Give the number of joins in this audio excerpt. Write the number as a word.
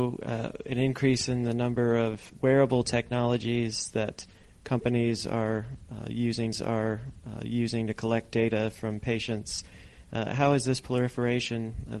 one